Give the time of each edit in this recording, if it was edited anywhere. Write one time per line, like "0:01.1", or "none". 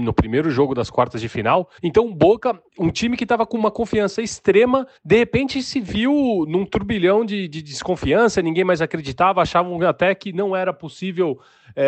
0:01.8
0:02.7
0:05.0